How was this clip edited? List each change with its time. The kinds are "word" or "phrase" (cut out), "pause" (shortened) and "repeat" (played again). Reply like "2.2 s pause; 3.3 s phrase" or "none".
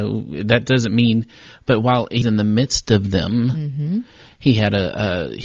2.2 s word